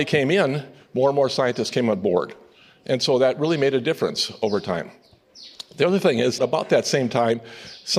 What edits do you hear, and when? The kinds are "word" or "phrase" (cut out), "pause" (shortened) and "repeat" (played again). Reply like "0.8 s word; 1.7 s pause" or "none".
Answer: 6.4 s word